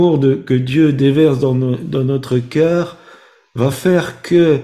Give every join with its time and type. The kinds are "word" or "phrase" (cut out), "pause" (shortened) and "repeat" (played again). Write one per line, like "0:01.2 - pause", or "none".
none